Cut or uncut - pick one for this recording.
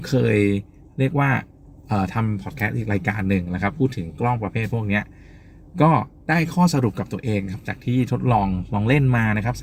cut